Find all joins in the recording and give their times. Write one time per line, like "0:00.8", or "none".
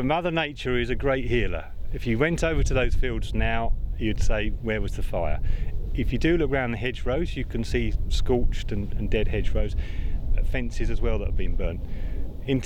none